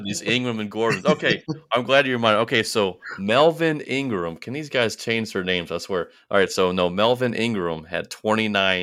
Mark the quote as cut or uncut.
uncut